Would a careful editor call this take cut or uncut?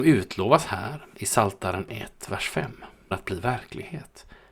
cut